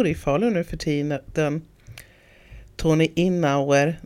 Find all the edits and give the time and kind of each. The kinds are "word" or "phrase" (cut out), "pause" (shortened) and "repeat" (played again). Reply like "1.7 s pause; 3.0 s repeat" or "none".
none